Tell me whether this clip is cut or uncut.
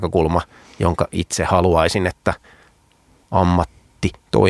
uncut